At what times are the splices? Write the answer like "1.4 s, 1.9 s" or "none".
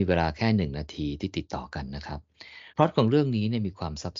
2.7 s